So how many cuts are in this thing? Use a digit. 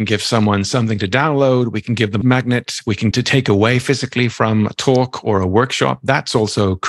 2